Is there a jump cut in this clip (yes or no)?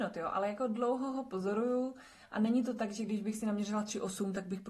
no